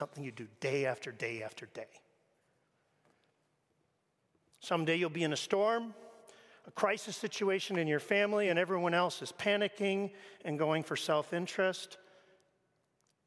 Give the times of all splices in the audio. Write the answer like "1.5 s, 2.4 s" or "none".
none